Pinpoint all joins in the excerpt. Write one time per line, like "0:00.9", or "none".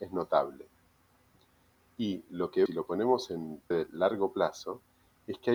0:02.7
0:03.7